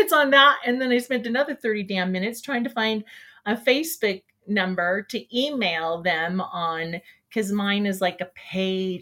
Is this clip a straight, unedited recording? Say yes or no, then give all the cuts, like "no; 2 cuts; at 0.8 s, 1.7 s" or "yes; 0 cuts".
yes; 0 cuts